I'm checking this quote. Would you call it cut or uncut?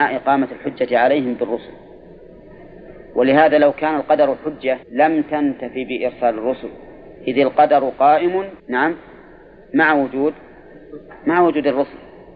cut